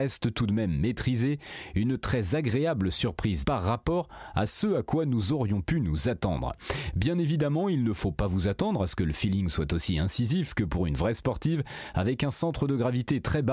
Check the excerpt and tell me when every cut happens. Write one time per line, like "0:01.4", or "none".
0:03.4

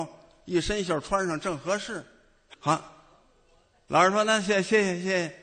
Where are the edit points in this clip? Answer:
0:02.5

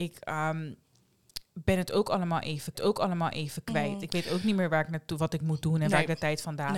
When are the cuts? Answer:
0:02.7

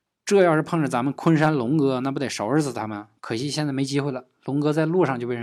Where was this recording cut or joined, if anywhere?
0:03.2

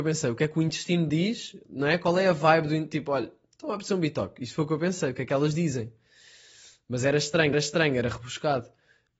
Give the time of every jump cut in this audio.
0:07.5

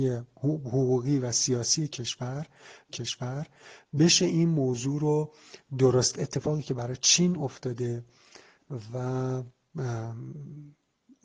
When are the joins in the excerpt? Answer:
0:02.9
0:06.1

